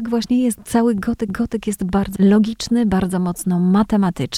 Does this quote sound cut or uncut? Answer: cut